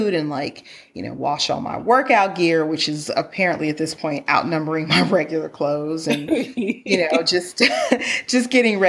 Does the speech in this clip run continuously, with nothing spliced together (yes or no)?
yes